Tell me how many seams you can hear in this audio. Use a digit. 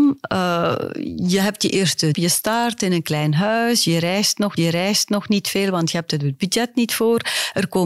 2